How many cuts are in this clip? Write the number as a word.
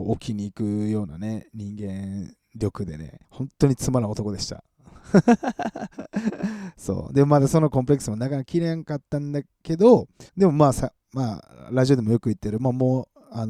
three